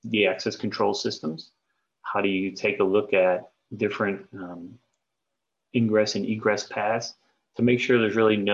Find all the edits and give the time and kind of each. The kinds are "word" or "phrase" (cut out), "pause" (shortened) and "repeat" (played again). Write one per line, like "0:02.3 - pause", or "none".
none